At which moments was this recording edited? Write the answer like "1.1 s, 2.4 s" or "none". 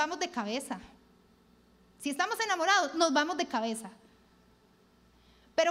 none